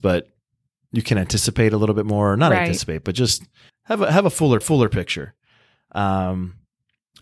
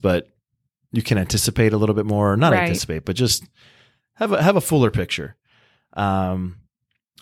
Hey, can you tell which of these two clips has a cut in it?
first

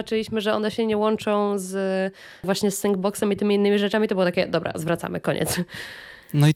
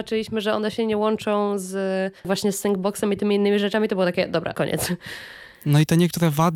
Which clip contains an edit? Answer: second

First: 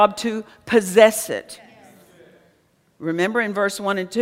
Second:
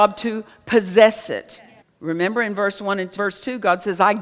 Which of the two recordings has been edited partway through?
second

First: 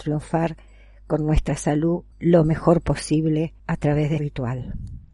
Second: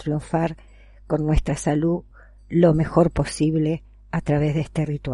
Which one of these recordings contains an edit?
first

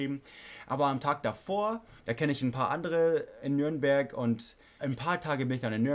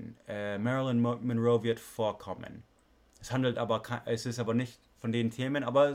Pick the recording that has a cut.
first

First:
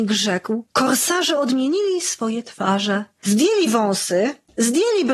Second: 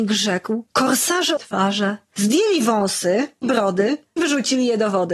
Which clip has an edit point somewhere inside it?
second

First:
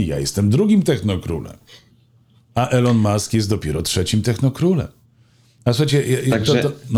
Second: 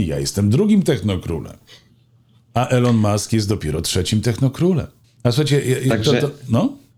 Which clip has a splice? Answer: second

